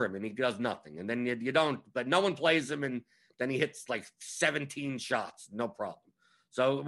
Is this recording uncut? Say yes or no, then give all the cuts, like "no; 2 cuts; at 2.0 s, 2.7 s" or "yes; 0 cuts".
yes; 0 cuts